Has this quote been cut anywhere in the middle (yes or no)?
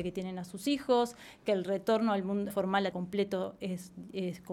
yes